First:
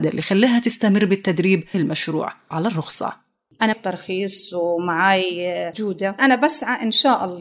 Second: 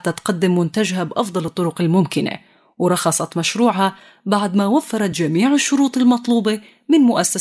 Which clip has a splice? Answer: first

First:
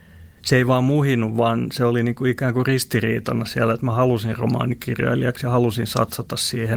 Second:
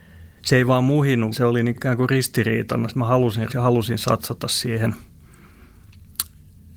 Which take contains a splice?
second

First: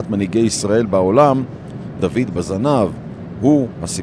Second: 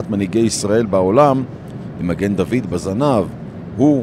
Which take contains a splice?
first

